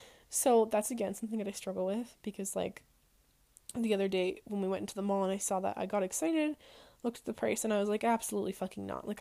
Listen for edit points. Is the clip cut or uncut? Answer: uncut